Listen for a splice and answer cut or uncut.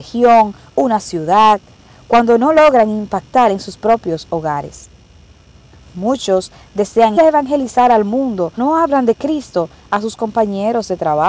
cut